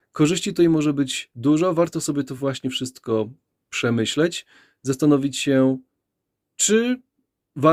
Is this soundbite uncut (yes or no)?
yes